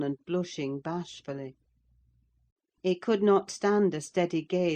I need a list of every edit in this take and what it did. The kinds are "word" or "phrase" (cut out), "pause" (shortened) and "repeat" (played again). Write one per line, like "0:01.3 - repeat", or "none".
none